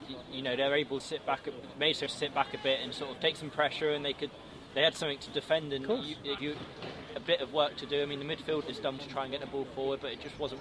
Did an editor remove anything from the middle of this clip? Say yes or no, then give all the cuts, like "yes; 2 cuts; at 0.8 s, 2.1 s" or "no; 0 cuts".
yes; 6 cuts; at 1.0 s, 2.1 s, 3.2 s, 6.4 s, 8.6 s, 9.0 s